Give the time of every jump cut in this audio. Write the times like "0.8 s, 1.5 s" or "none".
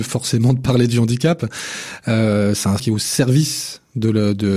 2.8 s